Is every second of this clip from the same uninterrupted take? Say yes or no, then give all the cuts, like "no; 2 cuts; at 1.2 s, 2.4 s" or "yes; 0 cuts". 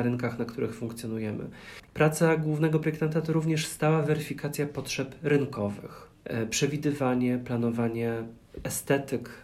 yes; 0 cuts